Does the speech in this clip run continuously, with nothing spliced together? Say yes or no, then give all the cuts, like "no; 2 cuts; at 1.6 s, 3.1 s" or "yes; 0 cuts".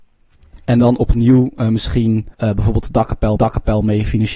no; 2 cuts; at 2.3 s, 3.4 s